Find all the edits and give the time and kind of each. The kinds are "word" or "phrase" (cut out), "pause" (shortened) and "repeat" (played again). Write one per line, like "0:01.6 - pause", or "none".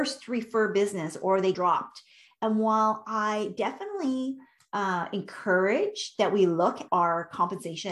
0:01.5 - word
0:04.6 - pause
0:06.9 - word